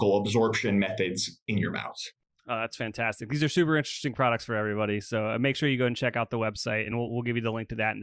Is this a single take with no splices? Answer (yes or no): yes